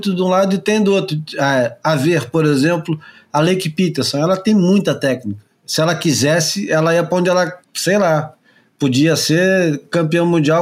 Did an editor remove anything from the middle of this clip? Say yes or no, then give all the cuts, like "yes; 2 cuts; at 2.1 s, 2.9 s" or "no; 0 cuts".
yes; 1 cut; at 7.6 s